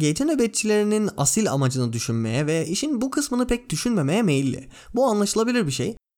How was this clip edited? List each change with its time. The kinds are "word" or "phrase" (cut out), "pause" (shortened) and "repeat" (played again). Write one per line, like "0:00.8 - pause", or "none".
none